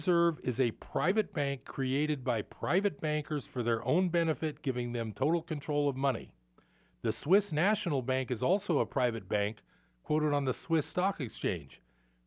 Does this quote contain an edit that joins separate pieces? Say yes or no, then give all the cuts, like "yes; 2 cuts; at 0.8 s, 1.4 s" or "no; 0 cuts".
no; 0 cuts